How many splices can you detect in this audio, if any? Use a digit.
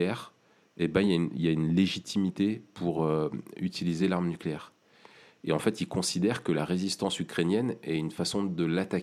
0